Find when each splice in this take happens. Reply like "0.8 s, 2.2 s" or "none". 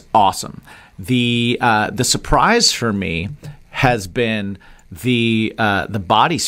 none